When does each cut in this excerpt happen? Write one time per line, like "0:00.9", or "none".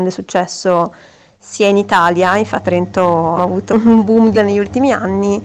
0:02.6
0:03.4
0:03.7
0:04.3